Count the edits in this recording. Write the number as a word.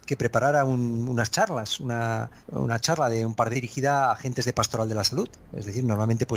three